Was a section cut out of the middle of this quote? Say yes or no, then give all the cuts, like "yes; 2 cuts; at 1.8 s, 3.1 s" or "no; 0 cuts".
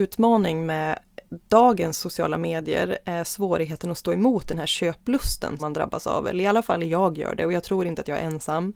yes; 1 cut; at 5.6 s